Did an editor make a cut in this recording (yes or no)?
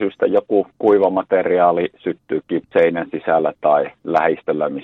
yes